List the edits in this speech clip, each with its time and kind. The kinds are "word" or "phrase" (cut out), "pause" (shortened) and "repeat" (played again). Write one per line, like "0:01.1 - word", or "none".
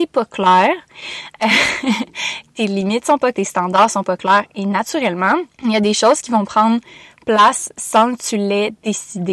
0:03.3 - word
0:05.5 - pause